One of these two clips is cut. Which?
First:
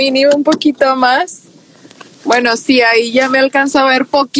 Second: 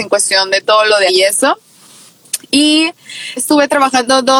second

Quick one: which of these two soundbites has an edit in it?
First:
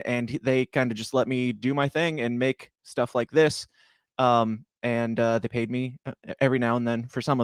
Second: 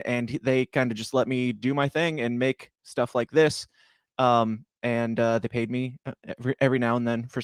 first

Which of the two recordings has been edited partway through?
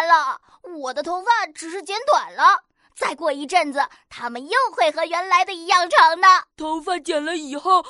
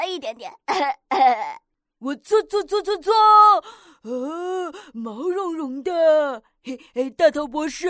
first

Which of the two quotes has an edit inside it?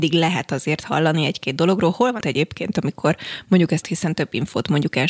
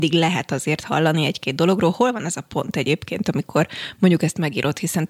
first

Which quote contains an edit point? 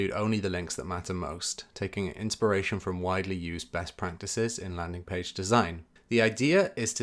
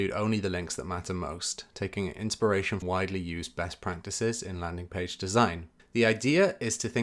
second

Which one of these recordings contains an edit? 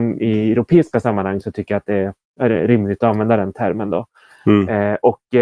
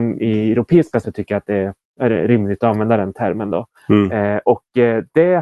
second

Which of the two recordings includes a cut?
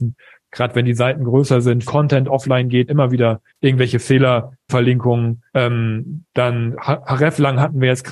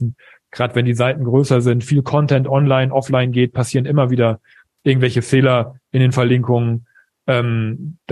first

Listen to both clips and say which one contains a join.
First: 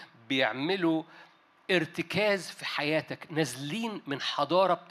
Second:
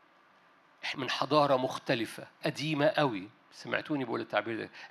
second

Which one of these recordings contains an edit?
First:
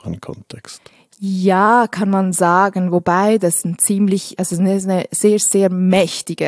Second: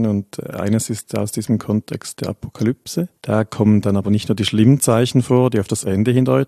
second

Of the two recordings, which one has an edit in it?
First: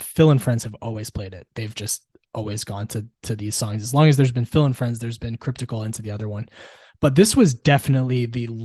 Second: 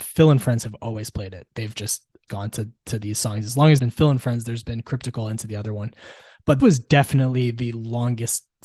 second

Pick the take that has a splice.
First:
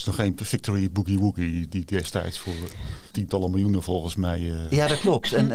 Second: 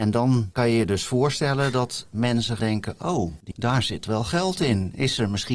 second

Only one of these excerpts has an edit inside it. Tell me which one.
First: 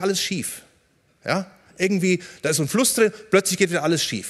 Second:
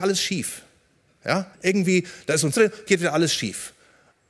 second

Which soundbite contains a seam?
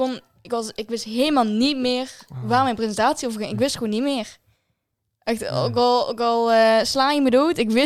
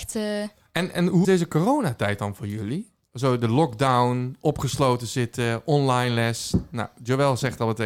second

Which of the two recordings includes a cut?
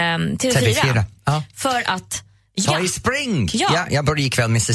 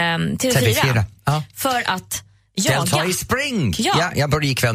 first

